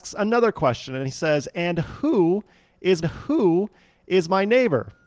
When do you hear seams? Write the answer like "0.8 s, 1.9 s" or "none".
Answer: 3.0 s